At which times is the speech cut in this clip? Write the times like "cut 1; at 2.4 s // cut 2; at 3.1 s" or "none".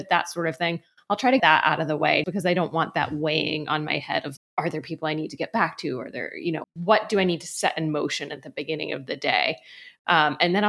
cut 1; at 1.4 s // cut 2; at 2.2 s // cut 3; at 4.4 s // cut 4; at 6.6 s